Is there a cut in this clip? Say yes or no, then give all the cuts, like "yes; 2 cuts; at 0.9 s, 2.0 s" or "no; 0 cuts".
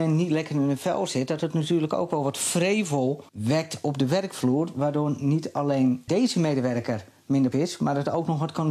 yes; 3 cuts; at 3.3 s, 6.1 s, 7.5 s